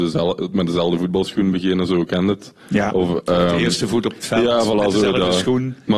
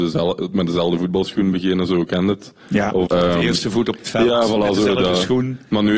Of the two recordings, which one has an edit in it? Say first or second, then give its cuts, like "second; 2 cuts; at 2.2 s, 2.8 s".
second; 1 cut; at 3.1 s